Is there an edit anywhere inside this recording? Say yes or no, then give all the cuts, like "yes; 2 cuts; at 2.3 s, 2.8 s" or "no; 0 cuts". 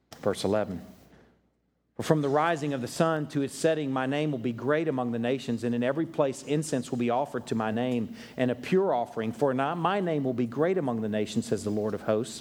no; 0 cuts